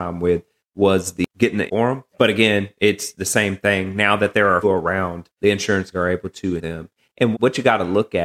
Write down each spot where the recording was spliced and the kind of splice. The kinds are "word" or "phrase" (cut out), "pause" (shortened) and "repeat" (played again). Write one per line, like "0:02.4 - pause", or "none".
0:01.3 - pause
0:01.7 - word
0:02.1 - pause
0:04.6 - word
0:05.9 - word
0:06.6 - word
0:07.3 - word